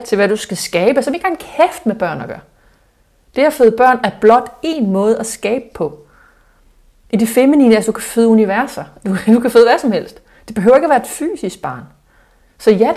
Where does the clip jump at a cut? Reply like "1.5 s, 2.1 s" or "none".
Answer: none